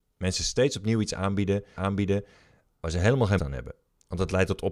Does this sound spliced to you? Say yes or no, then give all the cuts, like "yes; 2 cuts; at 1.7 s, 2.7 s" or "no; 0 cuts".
yes; 2 cuts; at 1.8 s, 3.4 s